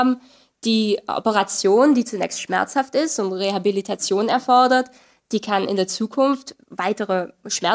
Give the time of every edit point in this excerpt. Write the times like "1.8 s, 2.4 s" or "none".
none

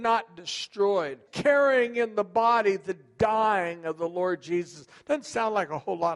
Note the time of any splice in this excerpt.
1.3 s

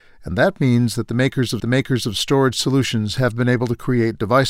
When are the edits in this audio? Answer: 1.6 s

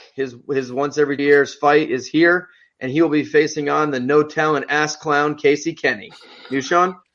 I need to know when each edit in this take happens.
1.2 s

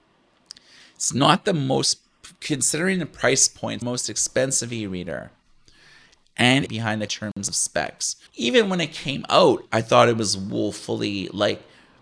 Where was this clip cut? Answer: 3.8 s, 6.7 s, 7.1 s, 8.3 s

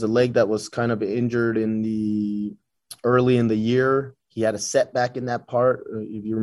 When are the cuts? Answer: 4.2 s

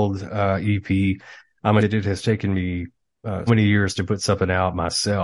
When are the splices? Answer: 1.8 s, 3.5 s

